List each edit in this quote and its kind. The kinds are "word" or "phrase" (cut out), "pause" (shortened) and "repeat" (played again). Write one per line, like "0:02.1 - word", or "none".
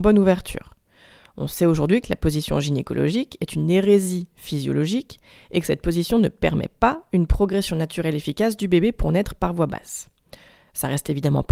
none